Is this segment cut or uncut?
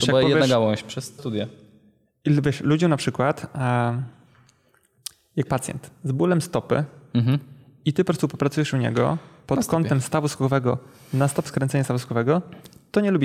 cut